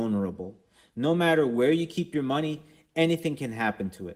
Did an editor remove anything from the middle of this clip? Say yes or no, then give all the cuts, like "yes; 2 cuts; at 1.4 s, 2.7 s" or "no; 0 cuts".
no; 0 cuts